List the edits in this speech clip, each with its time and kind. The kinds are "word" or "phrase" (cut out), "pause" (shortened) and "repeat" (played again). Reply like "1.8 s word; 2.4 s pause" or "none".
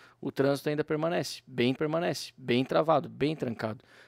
1.8 s repeat